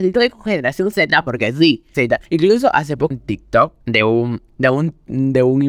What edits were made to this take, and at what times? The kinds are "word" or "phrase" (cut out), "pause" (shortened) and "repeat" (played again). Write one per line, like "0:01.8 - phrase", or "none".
0:00.9 - word
0:01.9 - word
0:02.3 - pause
0:03.1 - word
0:03.8 - pause
0:04.5 - pause